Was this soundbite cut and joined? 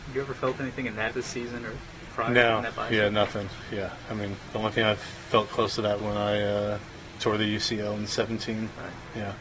yes; 2 cuts; at 1.1 s, 6.0 s

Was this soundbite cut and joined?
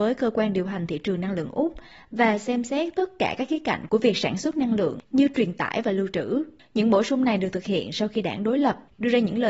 no; 0 cuts

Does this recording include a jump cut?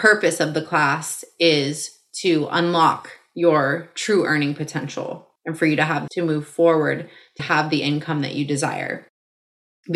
yes; 3 cuts; at 5.4 s, 6.1 s, 7.4 s

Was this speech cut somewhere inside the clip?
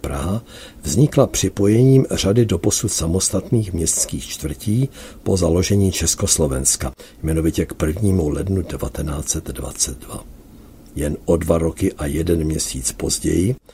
no; 0 cuts

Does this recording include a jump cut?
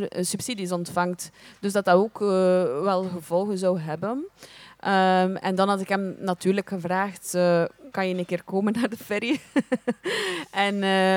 no; 0 cuts

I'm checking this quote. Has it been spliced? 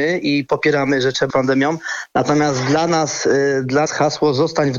yes; 2 cuts; at 1.3 s, 3.9 s

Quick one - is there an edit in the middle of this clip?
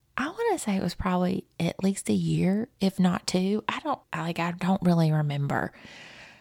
yes; 1 cut; at 4.0 s

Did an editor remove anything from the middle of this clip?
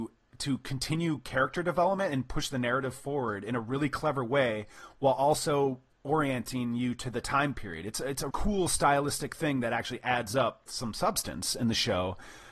yes; 2 cuts; at 8.3 s, 10.7 s

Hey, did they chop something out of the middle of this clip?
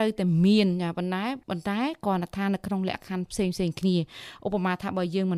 yes; 1 cut; at 1.4 s

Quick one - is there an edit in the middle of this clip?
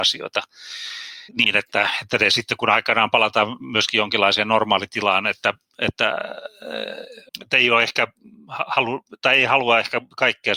yes; 2 cuts; at 1.3 s, 7.3 s

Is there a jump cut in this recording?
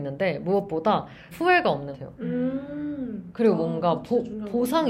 yes; 2 cuts; at 1.3 s, 1.9 s

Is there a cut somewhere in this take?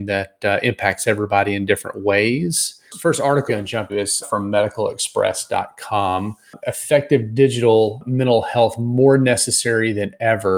yes; 3 cuts; at 3.5 s, 3.9 s, 4.2 s

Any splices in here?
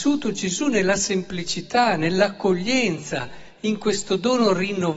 no; 0 cuts

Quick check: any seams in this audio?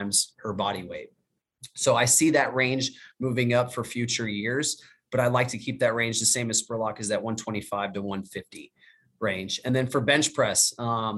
no; 0 cuts

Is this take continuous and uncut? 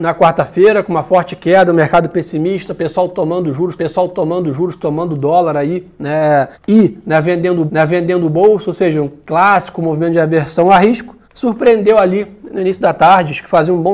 no; 4 cuts; at 3.8 s, 6.5 s, 7.7 s, 11.2 s

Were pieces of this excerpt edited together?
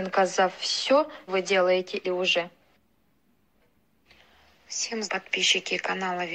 yes; 3 cuts; at 1.3 s, 2.0 s, 5.1 s

